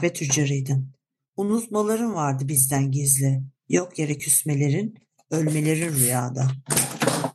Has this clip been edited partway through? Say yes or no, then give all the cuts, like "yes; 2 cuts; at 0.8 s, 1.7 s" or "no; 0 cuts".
no; 0 cuts